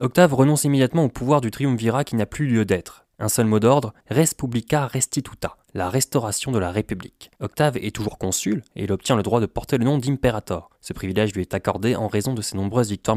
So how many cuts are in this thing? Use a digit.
5